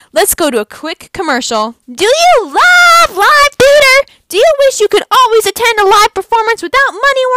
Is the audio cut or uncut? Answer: cut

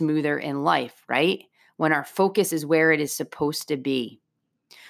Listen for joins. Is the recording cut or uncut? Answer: uncut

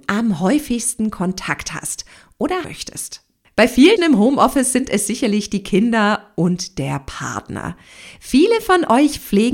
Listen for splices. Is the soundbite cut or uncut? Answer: cut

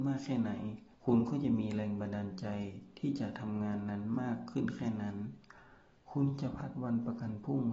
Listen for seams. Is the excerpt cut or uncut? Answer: cut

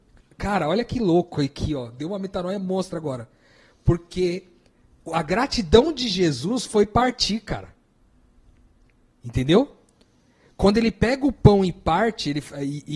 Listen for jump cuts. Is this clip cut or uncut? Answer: uncut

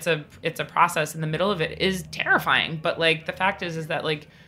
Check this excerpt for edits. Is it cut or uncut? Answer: uncut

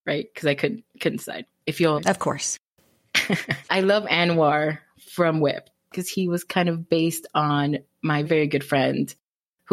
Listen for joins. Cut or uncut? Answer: cut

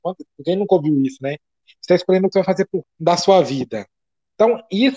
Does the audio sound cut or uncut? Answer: cut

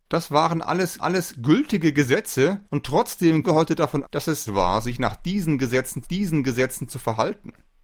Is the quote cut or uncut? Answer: cut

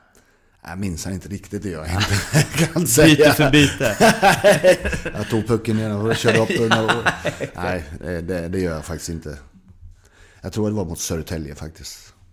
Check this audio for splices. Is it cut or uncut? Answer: uncut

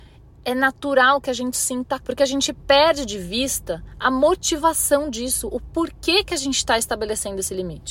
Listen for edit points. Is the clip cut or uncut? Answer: cut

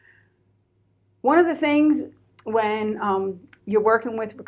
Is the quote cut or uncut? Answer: uncut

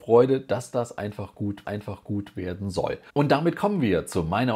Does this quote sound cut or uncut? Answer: cut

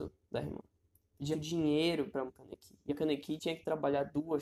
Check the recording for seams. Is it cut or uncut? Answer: cut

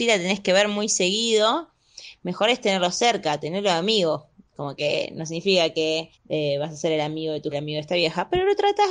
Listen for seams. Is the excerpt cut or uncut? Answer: cut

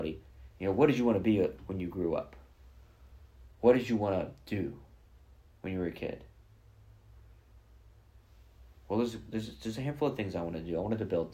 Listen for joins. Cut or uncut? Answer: uncut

